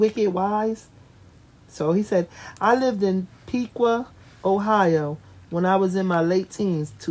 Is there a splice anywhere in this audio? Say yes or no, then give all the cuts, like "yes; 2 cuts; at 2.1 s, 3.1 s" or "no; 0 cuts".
no; 0 cuts